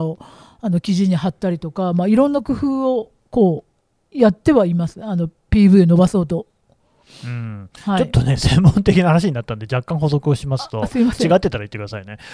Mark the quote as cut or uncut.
uncut